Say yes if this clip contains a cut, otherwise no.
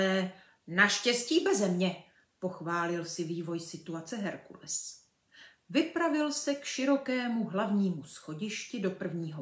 no